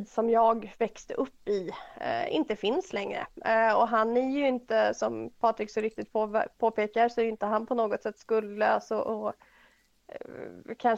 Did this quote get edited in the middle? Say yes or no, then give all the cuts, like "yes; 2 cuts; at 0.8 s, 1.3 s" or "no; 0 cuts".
no; 0 cuts